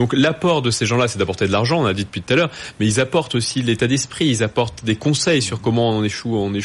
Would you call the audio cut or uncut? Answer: uncut